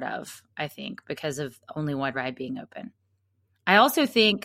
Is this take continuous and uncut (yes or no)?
yes